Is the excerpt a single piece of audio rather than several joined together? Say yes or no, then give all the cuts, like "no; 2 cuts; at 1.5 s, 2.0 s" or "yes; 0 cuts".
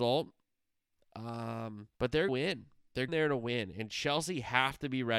no; 3 cuts; at 1.9 s, 2.3 s, 3.1 s